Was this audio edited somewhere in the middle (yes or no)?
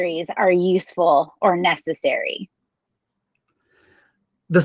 no